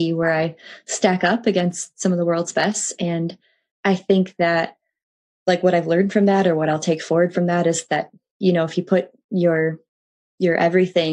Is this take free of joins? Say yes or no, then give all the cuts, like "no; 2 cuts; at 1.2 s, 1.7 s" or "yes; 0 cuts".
yes; 0 cuts